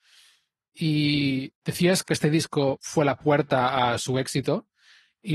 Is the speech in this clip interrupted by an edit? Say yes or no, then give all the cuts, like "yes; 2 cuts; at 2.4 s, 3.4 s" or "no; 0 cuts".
no; 0 cuts